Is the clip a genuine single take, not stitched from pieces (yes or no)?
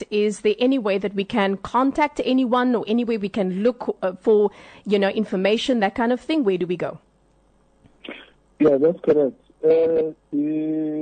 yes